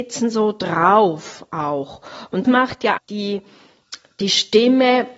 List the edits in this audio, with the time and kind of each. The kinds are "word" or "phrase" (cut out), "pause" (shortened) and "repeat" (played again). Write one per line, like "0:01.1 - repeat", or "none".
0:02.4 - word
0:03.0 - word